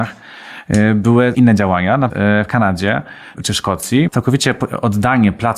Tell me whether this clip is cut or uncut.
cut